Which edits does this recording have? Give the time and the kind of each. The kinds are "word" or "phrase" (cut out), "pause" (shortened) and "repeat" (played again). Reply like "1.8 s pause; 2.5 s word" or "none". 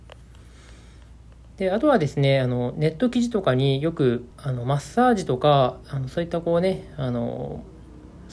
4.3 s pause